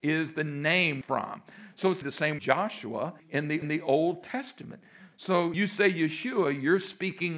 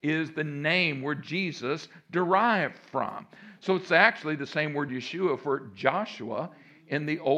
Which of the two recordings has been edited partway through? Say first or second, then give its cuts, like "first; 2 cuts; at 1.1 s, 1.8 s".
first; 6 cuts; at 1.0 s, 2.0 s, 2.4 s, 3.2 s, 3.6 s, 5.5 s